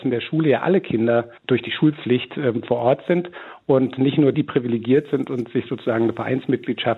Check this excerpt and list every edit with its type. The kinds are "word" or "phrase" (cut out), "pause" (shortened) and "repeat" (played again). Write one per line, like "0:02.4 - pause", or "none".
0:01.4 - pause
0:04.3 - word

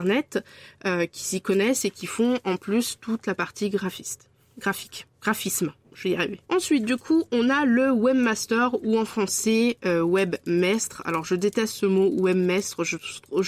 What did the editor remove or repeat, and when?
0:05.1 - pause
0:06.4 - pause

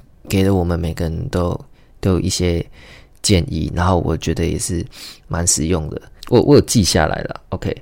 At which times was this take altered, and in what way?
0:06.2 - word

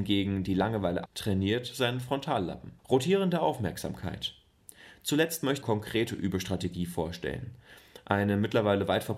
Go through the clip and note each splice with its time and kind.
0:01.1 - word
0:02.8 - pause
0:05.6 - phrase

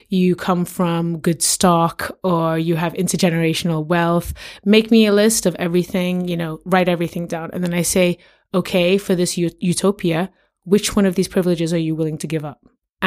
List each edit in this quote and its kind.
none

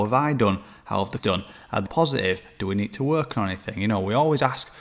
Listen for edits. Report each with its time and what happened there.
0:01.2 - word
0:01.9 - word

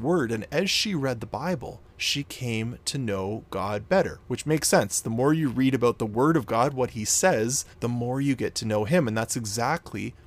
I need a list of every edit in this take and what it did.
0:01.9 - pause
0:07.7 - pause

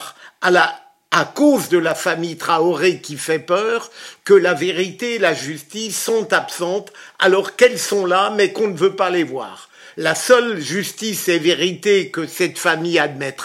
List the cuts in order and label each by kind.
none

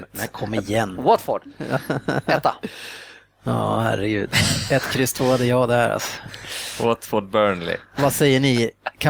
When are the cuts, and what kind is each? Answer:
none

